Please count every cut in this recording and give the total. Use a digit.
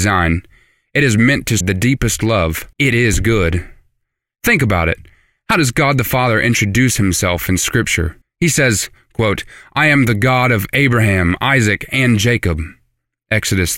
3